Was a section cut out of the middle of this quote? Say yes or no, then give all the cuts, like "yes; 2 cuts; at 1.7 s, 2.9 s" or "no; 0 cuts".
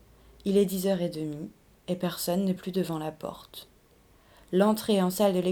no; 0 cuts